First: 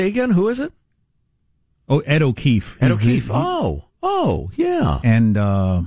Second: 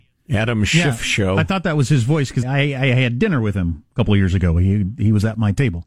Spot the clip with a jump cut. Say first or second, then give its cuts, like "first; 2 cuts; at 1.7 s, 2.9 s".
second; 1 cut; at 2.4 s